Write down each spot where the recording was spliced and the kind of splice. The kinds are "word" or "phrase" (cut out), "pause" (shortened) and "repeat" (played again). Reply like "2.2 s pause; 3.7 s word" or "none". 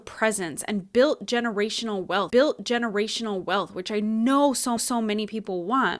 2.3 s repeat; 4.8 s repeat